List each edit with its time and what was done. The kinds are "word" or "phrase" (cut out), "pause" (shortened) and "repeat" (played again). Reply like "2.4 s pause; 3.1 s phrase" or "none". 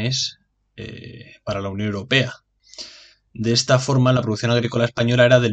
none